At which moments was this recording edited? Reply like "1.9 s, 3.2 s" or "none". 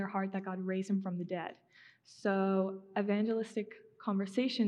none